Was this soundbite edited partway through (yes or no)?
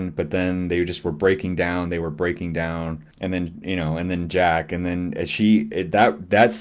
yes